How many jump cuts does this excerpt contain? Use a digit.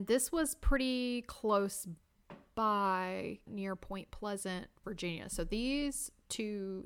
2